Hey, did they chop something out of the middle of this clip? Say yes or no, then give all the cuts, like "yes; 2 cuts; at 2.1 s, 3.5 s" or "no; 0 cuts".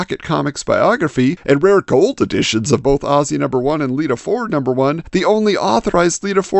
no; 0 cuts